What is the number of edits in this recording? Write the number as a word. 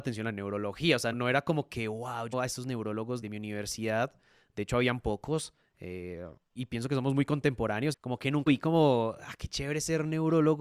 six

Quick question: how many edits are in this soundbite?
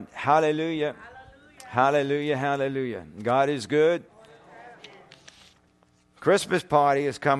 one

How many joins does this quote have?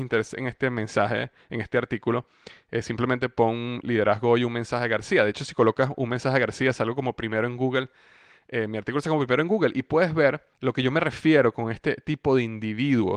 one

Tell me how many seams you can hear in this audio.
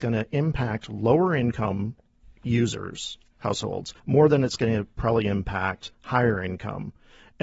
three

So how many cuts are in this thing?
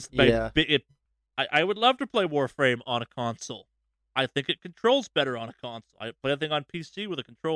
zero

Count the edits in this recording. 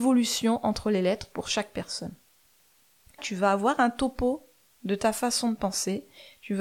one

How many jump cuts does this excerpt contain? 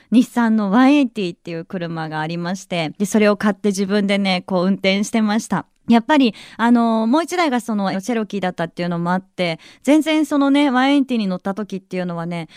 three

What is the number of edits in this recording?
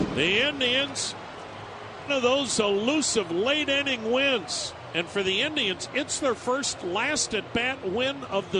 one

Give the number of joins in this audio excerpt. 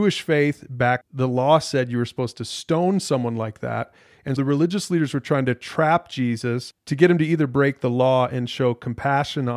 two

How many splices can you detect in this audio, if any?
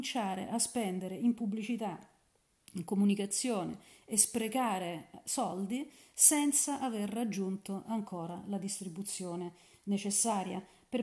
zero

